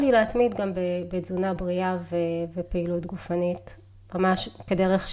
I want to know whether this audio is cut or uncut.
uncut